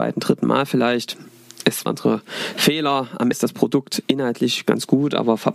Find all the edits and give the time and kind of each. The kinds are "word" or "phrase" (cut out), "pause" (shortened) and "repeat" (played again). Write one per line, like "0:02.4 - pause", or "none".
0:01.9 - phrase
0:03.3 - word